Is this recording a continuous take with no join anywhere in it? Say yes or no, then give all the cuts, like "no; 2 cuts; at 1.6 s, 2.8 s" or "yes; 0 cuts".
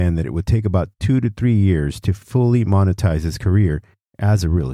yes; 0 cuts